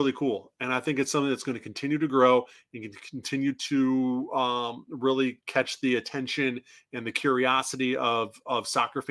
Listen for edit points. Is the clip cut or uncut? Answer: uncut